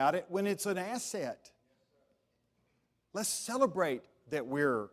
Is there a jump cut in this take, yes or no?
no